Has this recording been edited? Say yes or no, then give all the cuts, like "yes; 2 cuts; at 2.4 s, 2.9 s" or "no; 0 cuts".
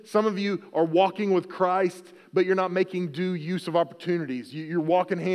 no; 0 cuts